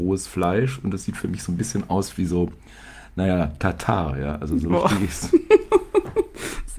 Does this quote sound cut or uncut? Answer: uncut